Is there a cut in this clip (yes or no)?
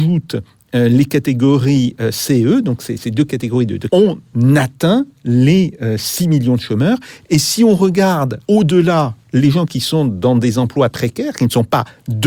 yes